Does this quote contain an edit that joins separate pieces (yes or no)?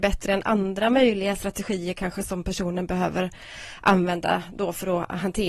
no